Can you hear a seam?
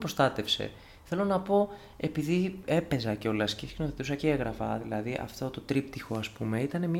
no; 0 cuts

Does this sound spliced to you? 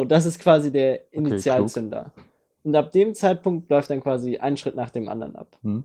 no; 0 cuts

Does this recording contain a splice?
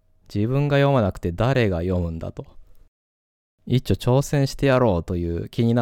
no; 0 cuts

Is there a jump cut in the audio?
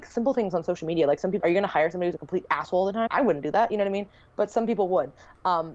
yes; 2 cuts; at 1.4 s, 3.1 s

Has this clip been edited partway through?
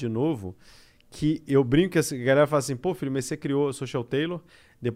no; 0 cuts

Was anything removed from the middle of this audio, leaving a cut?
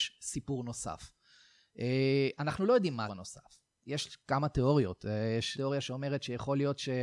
yes; 2 cuts; at 3.1 s, 5.5 s

